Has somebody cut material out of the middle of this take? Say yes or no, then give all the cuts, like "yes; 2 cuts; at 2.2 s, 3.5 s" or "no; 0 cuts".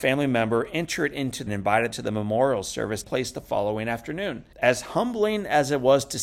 yes; 4 cuts; at 1.5 s, 1.9 s, 3.0 s, 4.5 s